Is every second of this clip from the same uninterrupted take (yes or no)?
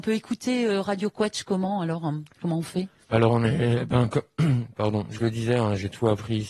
yes